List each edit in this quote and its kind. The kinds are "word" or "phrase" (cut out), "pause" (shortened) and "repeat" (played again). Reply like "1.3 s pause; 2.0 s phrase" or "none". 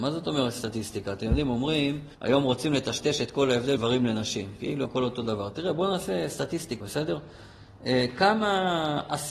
2.1 s pause; 3.8 s word; 4.8 s phrase; 6.8 s word